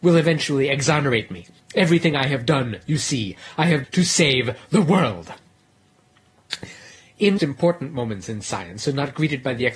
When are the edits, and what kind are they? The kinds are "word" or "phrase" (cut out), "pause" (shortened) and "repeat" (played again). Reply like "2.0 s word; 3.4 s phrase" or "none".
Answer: 1.6 s pause; 3.8 s word; 7.4 s phrase